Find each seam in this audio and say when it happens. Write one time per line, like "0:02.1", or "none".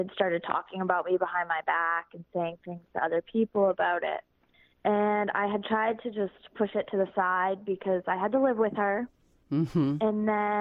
none